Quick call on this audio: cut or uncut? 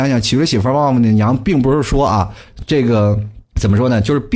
cut